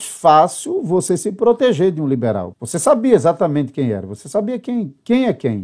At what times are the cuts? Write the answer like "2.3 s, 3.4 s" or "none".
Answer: 2.5 s